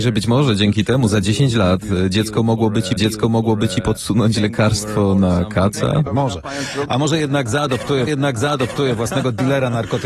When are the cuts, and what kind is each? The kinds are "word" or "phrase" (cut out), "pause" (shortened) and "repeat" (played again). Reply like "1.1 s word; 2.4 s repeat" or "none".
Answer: 3.0 s repeat; 6.1 s phrase; 8.1 s repeat